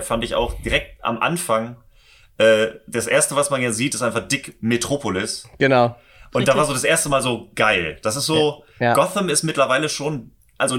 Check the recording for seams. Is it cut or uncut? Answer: uncut